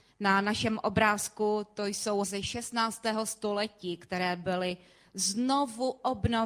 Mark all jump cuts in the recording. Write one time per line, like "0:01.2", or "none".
0:02.2